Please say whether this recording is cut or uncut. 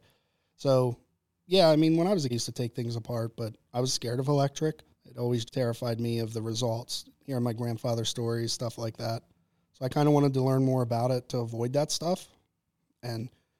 cut